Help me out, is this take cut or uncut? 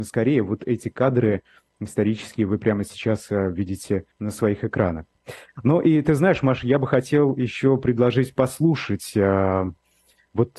cut